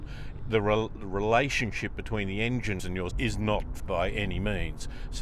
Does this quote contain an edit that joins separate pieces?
yes; 3 cuts; at 2.8 s, 3.1 s, 3.8 s

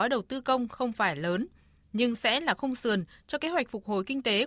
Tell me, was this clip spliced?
no; 0 cuts

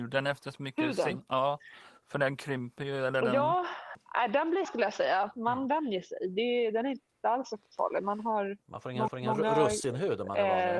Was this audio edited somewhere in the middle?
yes; 2 cuts; at 4.6 s, 9.1 s

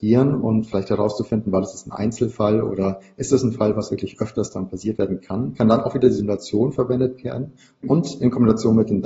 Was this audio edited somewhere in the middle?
no; 0 cuts

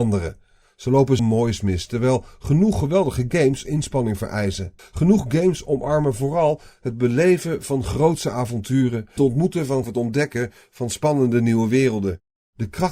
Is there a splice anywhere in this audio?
yes; 5 cuts; at 1.2 s, 3.6 s, 4.8 s, 9.2 s, 9.8 s

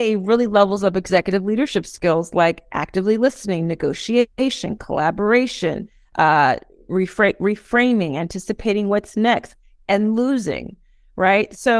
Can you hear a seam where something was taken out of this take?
no; 0 cuts

